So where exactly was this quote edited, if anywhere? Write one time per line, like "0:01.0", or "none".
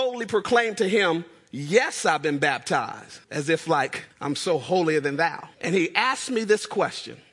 0:03.2
0:04.1
0:05.5